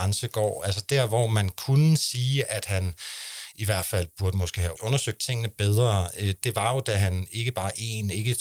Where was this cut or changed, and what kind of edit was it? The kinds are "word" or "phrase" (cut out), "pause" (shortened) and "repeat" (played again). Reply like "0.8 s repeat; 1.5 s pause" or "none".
4.8 s word

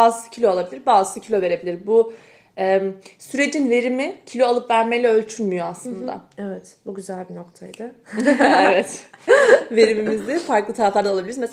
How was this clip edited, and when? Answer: none

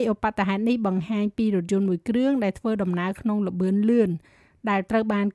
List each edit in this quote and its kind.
none

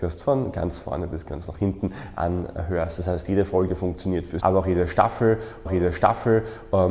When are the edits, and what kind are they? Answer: 4.4 s word; 5.7 s repeat

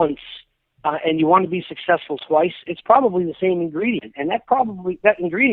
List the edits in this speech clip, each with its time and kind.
none

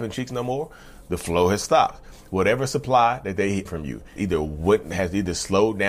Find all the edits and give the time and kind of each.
3.7 s phrase; 4.2 s word

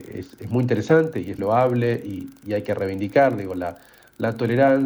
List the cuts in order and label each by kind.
1.4 s word

